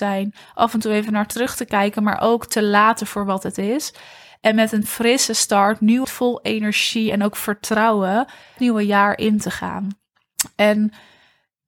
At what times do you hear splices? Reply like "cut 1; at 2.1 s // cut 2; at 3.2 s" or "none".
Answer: cut 1; at 6.0 s // cut 2; at 8.6 s